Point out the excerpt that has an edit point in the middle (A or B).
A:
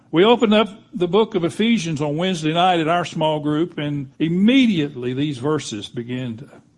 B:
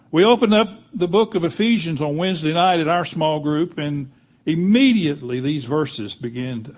A